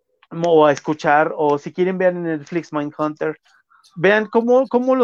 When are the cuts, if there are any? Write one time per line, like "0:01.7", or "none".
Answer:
none